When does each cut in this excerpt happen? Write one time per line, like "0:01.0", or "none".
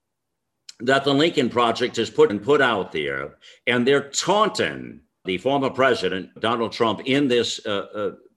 0:02.3
0:05.2
0:06.4